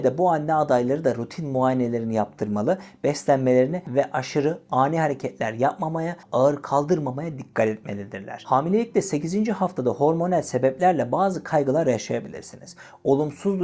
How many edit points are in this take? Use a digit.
1